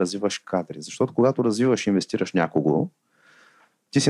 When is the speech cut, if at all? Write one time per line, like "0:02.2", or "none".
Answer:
none